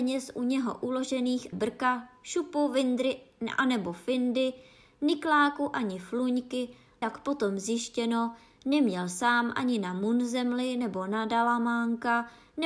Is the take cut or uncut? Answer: cut